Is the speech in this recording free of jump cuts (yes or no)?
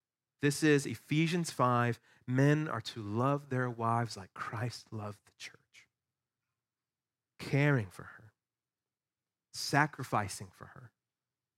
yes